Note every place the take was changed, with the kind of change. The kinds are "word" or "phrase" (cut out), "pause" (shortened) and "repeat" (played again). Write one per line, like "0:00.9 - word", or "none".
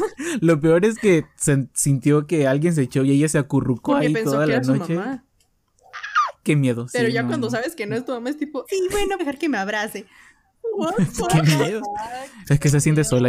0:08.7 - word
0:09.2 - word
0:11.1 - word